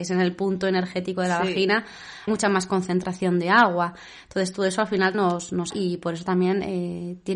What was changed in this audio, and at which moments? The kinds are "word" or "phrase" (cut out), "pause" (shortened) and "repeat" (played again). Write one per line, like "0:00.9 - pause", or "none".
0:02.3 - word
0:05.1 - word
0:05.7 - word